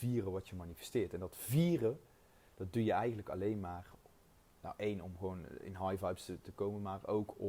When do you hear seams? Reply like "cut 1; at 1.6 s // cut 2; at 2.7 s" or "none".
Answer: none